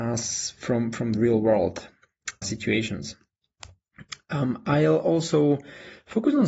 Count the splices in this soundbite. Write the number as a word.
two